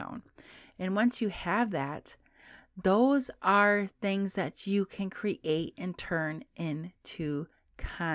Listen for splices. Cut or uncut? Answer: uncut